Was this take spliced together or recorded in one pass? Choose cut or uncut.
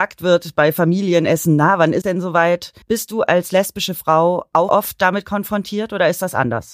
cut